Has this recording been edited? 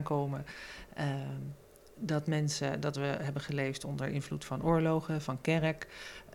no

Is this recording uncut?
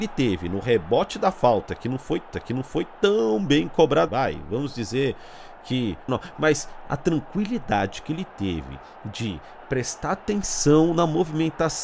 no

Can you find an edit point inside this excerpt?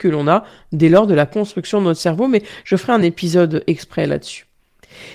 no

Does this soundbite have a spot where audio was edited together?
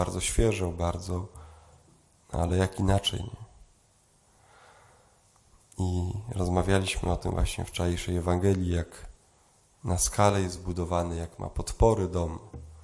no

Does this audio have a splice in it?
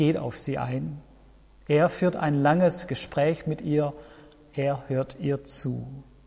no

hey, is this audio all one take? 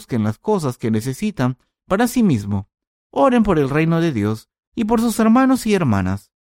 yes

